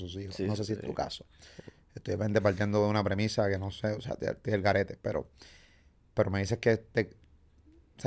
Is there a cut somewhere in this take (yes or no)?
no